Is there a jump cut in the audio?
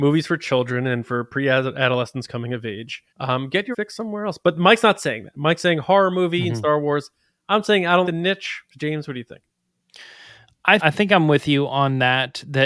yes; 4 cuts; at 3.1 s, 3.7 s, 8.0 s, 10.8 s

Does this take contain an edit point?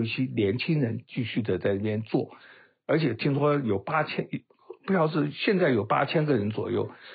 no; 0 cuts

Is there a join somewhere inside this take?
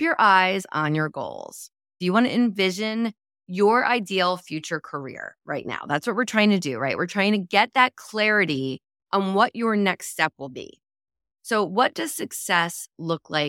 no; 0 cuts

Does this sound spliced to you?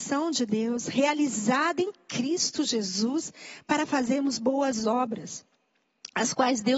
no; 0 cuts

